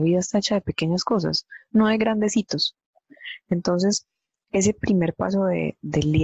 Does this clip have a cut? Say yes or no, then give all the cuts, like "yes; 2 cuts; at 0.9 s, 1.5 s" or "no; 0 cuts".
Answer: no; 0 cuts